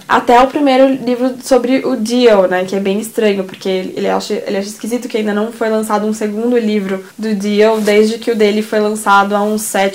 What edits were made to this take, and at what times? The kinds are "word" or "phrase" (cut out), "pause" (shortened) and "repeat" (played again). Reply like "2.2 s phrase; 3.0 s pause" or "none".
7.1 s pause